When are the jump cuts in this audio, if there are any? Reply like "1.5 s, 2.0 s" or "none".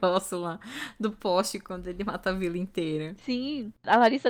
none